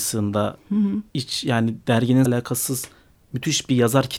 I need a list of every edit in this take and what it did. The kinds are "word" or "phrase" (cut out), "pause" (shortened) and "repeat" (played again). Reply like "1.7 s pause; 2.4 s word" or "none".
1.1 s pause; 2.3 s word